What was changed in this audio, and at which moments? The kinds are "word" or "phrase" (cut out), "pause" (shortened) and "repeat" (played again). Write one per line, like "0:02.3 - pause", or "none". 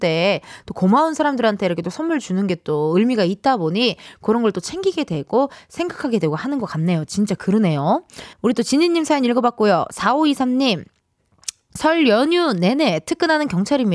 0:08.3 - pause